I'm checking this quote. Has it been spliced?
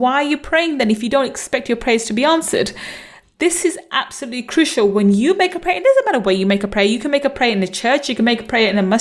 no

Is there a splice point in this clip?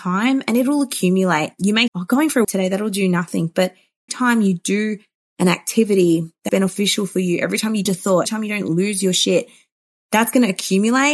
yes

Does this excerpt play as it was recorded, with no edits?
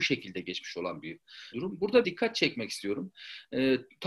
no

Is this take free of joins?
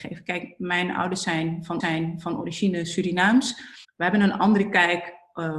no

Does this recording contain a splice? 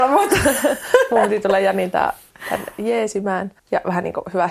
yes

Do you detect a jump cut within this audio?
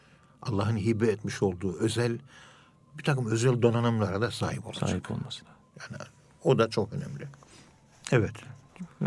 no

